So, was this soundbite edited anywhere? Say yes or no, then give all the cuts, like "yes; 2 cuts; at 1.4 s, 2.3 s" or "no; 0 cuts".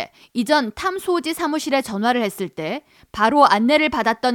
no; 0 cuts